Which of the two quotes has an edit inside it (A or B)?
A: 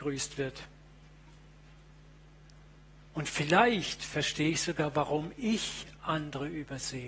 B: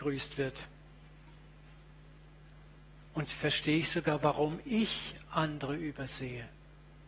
B